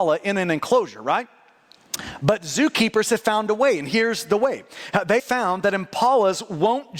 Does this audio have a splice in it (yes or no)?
yes